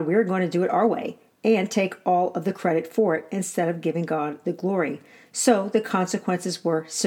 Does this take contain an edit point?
no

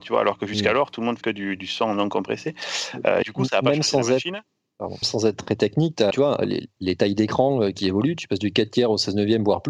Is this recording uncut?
no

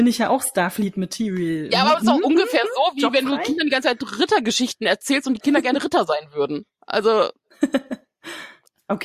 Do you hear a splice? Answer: no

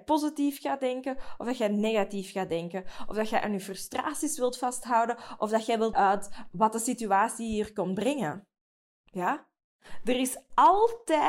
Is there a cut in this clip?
yes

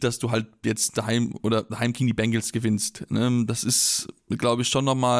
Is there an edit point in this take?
no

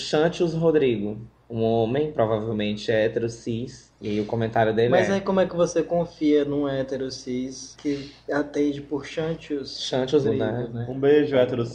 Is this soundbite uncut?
no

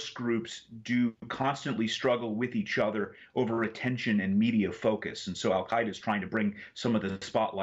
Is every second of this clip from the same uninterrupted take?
yes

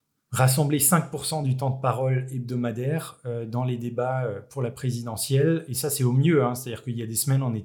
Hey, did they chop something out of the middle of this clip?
no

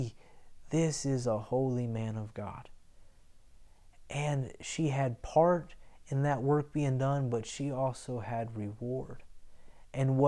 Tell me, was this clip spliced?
no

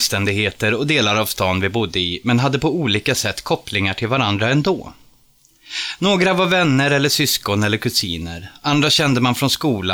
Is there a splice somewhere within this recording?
no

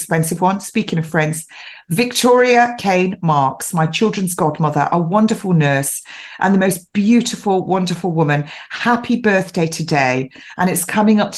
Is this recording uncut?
yes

